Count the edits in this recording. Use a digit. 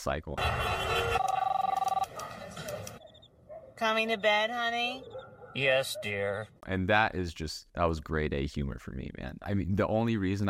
2